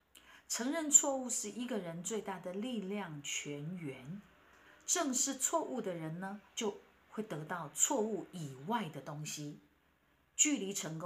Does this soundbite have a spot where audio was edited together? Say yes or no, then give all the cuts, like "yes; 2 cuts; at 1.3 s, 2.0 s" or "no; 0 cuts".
yes; 1 cut; at 6.5 s